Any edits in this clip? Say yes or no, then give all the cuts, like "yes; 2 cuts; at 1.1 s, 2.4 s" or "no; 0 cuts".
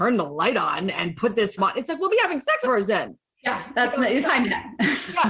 yes; 4 cuts; at 1.6 s, 2.1 s, 2.6 s, 4.2 s